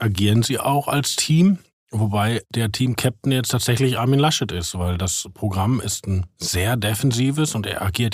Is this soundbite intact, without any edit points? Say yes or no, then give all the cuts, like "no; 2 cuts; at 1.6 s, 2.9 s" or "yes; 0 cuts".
yes; 0 cuts